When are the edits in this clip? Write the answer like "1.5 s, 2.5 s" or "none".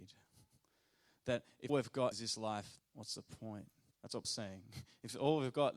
1.7 s, 2.1 s, 2.8 s, 3.9 s, 4.2 s